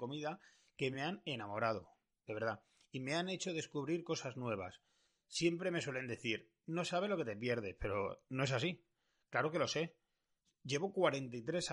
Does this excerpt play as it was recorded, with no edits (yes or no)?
yes